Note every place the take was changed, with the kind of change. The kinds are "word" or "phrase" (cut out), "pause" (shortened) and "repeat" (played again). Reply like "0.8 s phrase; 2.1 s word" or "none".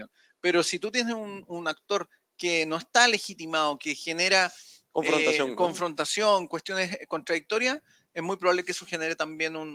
none